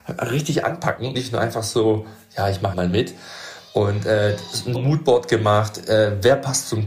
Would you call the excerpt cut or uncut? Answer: cut